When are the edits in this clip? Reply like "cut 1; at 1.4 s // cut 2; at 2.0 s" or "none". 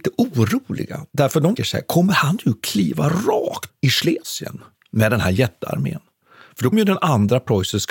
cut 1; at 1.6 s // cut 2; at 3.7 s // cut 3; at 6.7 s